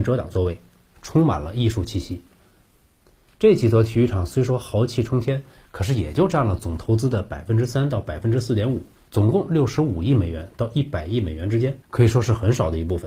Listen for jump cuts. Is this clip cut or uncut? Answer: cut